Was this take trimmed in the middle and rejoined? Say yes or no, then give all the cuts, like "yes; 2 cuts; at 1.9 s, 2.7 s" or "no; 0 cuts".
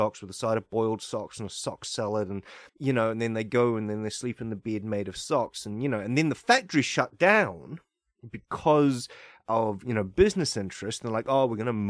yes; 1 cut; at 2.7 s